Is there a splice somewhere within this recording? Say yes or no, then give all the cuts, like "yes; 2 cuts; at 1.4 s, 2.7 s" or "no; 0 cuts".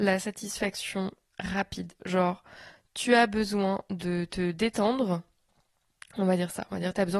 no; 0 cuts